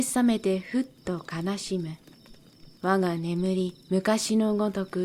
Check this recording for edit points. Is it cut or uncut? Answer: cut